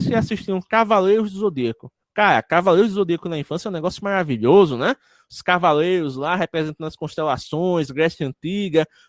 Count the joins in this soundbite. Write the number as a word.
one